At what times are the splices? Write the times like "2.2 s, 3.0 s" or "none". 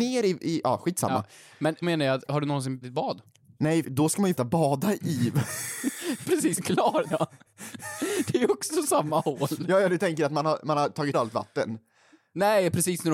1.8 s, 2.8 s, 3.8 s, 4.4 s, 6.2 s, 6.6 s, 7.1 s, 11.1 s